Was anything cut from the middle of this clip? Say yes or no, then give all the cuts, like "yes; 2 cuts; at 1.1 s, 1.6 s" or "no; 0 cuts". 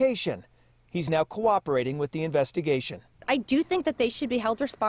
no; 0 cuts